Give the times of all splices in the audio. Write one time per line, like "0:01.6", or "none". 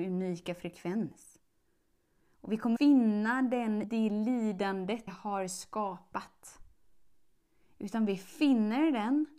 0:02.8
0:03.8
0:05.1